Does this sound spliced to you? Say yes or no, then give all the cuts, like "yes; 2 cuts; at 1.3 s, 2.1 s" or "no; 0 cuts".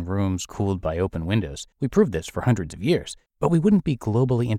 yes; 2 cuts; at 1.7 s, 3.3 s